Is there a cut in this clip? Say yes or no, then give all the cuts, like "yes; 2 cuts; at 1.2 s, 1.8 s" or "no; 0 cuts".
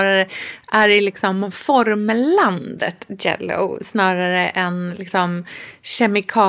no; 0 cuts